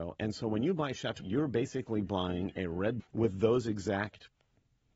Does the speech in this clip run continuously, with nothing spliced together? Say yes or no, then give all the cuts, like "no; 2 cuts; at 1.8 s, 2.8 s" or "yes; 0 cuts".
no; 2 cuts; at 1.2 s, 3.0 s